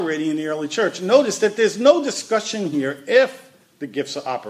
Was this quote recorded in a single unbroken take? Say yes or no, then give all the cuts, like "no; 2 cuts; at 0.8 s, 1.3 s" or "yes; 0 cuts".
yes; 0 cuts